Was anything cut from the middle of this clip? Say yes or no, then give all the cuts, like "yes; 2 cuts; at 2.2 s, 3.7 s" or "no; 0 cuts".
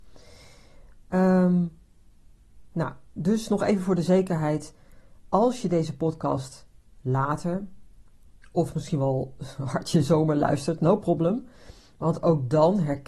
no; 0 cuts